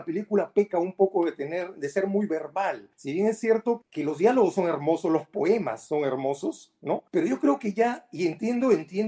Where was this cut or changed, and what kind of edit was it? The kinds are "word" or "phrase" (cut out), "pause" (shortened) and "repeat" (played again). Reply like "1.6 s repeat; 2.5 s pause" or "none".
2.9 s pause; 3.8 s word; 7.1 s pause